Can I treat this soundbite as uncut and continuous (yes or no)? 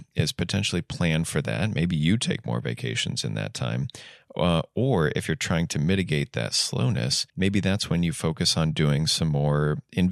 no